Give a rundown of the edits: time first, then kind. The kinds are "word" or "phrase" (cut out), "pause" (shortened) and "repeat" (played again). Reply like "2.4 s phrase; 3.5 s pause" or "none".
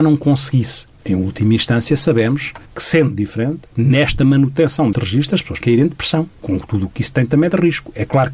1.0 s pause; 2.7 s pause; 3.7 s pause; 4.9 s word; 5.6 s word; 6.3 s pause